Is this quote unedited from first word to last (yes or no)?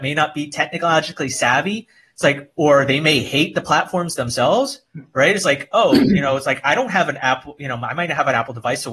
yes